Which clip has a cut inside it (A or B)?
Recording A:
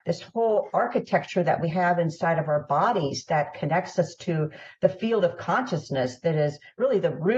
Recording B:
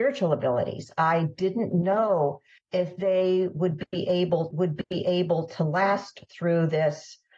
B